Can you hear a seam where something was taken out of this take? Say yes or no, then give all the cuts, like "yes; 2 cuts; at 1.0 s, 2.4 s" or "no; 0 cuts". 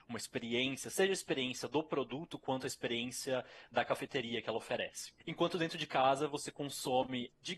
yes; 1 cut; at 5.2 s